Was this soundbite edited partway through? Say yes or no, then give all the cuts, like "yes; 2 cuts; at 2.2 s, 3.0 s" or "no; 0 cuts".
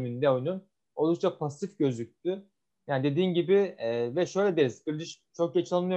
no; 0 cuts